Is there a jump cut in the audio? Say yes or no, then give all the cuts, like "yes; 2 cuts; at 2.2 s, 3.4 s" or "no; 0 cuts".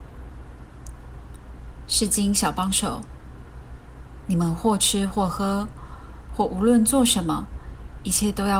yes; 1 cut; at 4.2 s